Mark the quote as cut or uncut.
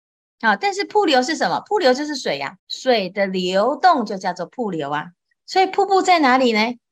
cut